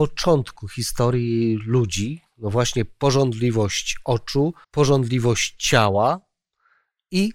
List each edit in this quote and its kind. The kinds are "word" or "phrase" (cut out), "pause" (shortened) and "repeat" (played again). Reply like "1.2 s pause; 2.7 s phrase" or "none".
4.6 s pause